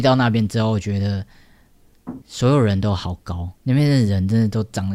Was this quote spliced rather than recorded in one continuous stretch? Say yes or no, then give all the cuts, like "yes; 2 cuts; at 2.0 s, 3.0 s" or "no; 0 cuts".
yes; 2 cuts; at 2.2 s, 3.6 s